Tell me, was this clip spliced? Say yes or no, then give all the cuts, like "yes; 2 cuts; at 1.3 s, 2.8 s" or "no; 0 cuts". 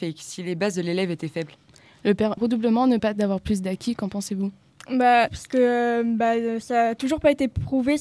yes; 3 cuts; at 2.4 s, 3.0 s, 5.3 s